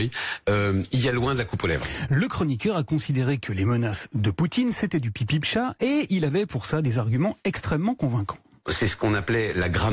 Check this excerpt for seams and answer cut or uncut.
uncut